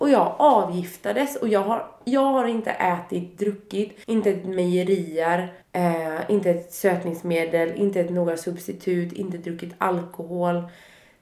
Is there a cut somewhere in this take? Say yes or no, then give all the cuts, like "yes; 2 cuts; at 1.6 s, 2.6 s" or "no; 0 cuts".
yes; 2 cuts; at 4.0 s, 5.6 s